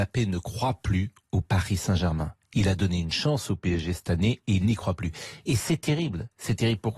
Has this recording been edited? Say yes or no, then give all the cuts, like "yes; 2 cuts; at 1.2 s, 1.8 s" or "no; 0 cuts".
no; 0 cuts